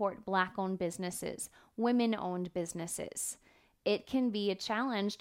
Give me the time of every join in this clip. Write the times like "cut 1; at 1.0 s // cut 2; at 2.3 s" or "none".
none